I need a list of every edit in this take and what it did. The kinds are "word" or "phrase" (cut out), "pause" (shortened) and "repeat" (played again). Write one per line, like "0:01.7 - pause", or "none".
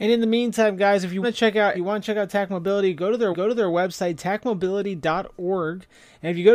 0:01.2 - word
0:01.7 - word
0:03.3 - repeat